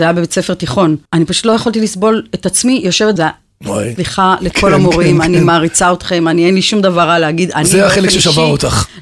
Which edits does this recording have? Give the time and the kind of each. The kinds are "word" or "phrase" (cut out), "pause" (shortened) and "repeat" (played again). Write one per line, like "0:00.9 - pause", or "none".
0:01.1 - pause
0:03.2 - phrase